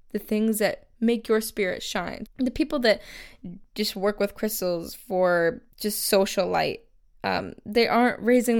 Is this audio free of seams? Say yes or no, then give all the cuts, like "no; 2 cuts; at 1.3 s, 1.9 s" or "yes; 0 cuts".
no; 2 cuts; at 2.3 s, 5.7 s